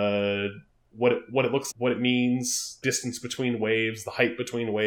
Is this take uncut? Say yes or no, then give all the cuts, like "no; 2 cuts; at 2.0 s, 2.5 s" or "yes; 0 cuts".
no; 2 cuts; at 1.7 s, 2.8 s